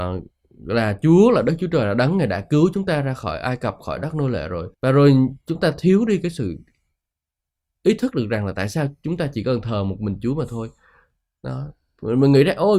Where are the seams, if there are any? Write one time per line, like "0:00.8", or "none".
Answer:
0:04.7
0:05.4